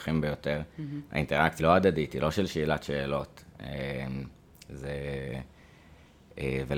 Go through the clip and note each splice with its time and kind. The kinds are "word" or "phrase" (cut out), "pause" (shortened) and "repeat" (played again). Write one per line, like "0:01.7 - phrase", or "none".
0:01.6 - phrase